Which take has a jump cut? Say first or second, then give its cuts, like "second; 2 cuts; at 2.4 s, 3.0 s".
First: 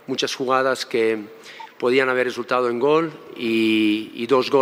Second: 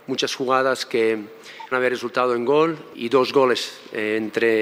second; 2 cuts; at 1.7 s, 2.9 s